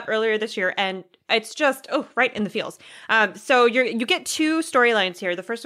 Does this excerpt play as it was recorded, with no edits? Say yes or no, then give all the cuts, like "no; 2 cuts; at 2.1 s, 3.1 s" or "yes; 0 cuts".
yes; 0 cuts